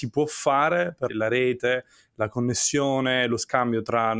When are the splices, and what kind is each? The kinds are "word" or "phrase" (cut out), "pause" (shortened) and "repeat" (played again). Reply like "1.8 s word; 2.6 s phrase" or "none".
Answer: 1.1 s word